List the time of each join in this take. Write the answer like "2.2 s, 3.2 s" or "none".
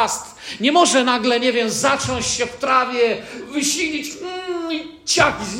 none